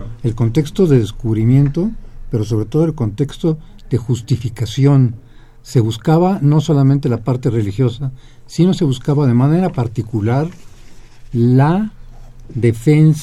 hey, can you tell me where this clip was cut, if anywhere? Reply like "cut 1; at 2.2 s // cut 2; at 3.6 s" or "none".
none